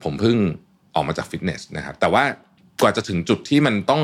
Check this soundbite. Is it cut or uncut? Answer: cut